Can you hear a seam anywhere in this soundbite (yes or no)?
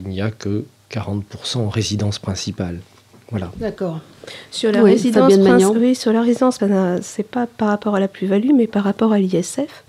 yes